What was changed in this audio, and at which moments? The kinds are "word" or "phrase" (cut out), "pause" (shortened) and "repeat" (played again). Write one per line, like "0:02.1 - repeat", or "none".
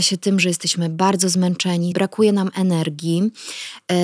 0:01.9 - word